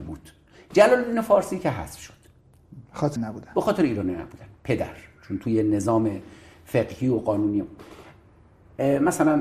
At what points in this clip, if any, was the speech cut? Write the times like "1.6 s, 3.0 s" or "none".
3.2 s